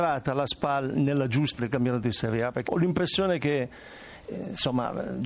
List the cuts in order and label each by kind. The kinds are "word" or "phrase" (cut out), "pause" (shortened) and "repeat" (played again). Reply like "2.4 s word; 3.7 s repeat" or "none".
1.6 s word; 2.7 s word